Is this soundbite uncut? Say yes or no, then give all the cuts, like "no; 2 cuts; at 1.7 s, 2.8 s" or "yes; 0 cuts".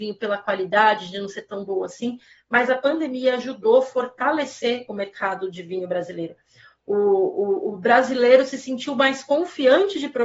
yes; 0 cuts